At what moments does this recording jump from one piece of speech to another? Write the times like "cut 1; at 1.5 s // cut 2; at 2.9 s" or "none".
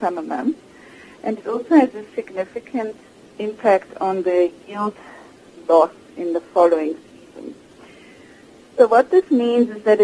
none

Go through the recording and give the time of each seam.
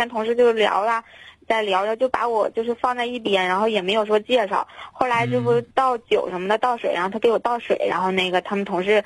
cut 1; at 5.7 s

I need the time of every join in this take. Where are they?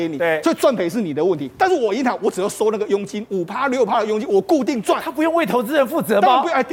none

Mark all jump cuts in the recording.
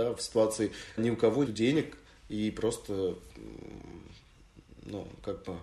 cut 1; at 1.0 s // cut 2; at 1.5 s

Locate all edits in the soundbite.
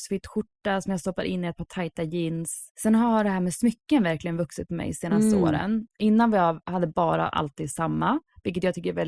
cut 1; at 5.9 s

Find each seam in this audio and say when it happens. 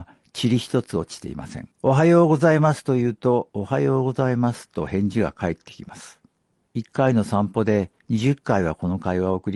cut 1; at 1.7 s // cut 2; at 6.4 s // cut 3; at 8.0 s

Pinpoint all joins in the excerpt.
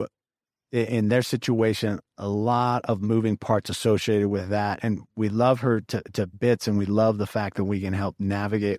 none

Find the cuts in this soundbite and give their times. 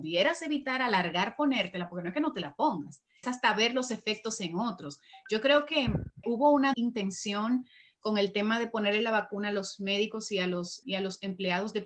cut 1; at 3.2 s // cut 2; at 6.2 s // cut 3; at 6.7 s // cut 4; at 10.8 s

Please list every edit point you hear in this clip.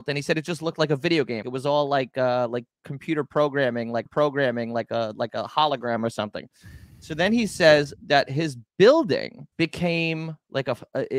cut 1; at 1.4 s // cut 2; at 4.1 s // cut 3; at 9.5 s

